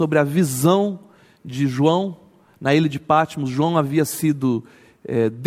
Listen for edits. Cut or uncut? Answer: uncut